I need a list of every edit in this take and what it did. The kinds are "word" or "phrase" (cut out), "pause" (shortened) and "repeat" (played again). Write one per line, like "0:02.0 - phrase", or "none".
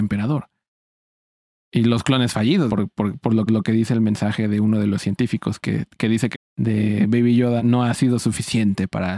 0:02.7 - phrase
0:03.5 - repeat
0:06.3 - phrase
0:07.6 - phrase